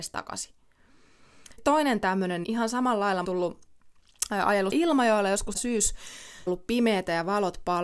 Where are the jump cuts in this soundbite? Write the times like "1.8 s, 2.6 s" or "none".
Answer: 1.6 s, 2.4 s, 3.2 s, 4.7 s, 5.5 s, 6.5 s